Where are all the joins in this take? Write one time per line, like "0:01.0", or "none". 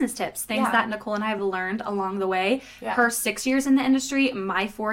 none